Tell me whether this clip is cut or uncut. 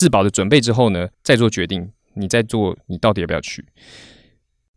cut